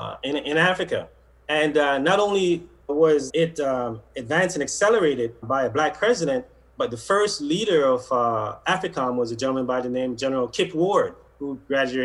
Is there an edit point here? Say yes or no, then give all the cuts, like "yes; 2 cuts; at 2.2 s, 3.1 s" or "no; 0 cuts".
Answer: yes; 3 cuts; at 2.9 s, 3.3 s, 5.4 s